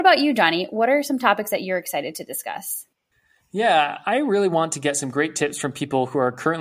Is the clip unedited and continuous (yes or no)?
no